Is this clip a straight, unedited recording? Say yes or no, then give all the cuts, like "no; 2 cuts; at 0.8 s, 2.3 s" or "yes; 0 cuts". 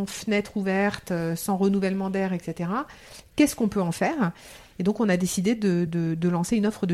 yes; 0 cuts